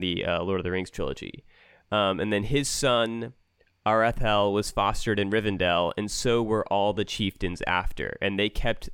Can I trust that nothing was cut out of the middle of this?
yes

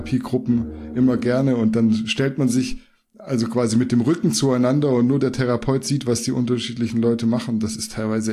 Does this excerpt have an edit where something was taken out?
no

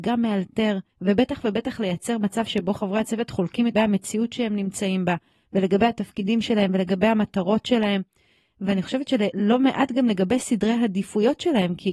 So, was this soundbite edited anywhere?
yes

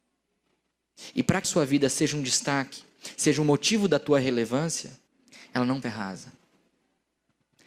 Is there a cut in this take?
yes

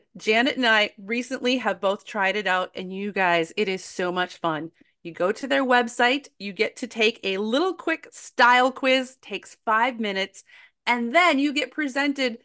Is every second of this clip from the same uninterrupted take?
yes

